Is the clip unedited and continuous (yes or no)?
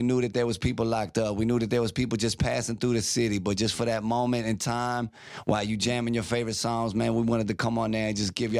yes